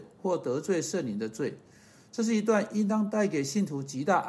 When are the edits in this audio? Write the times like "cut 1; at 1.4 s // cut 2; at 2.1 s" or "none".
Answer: none